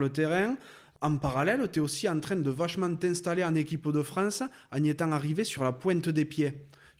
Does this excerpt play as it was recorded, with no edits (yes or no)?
yes